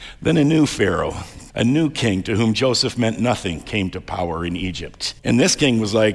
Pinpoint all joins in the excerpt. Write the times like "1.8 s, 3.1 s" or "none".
1.5 s, 5.2 s